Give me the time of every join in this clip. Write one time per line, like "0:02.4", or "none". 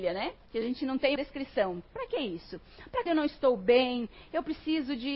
0:01.2
0:03.1